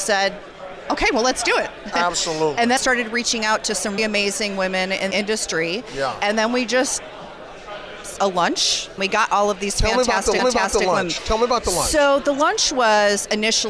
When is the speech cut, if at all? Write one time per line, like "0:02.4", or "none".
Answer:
0:02.8
0:04.0
0:05.1
0:08.2
0:09.0
0:10.4